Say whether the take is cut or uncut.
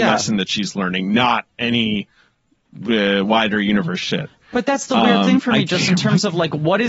uncut